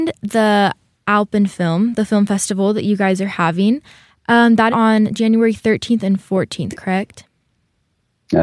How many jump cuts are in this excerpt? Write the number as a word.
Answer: one